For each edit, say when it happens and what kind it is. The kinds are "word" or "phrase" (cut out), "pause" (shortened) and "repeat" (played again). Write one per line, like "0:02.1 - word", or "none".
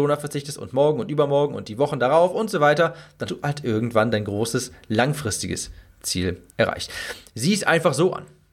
0:03.3 - word
0:06.5 - pause